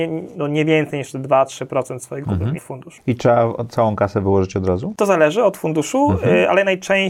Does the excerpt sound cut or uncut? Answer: cut